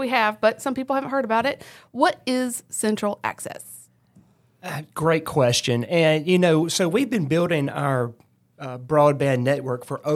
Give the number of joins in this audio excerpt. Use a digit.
0